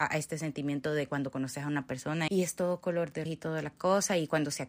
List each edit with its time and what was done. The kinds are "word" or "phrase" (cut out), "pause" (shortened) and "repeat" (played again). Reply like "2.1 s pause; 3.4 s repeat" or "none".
2.3 s word; 3.3 s word